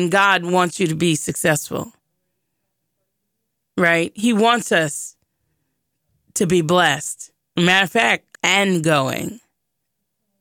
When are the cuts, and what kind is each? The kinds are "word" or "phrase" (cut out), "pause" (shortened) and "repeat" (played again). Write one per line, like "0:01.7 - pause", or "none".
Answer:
0:08.3 - word